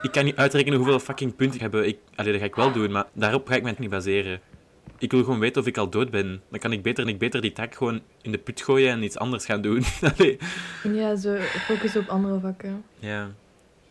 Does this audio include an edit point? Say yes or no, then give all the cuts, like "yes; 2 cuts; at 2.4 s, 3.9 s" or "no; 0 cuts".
yes; 5 cuts; at 1.6 s, 3.1 s, 3.8 s, 7.0 s, 12.9 s